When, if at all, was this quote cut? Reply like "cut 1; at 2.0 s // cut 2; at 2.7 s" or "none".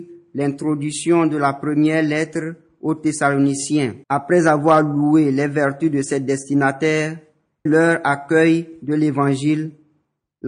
cut 1; at 4.0 s // cut 2; at 7.7 s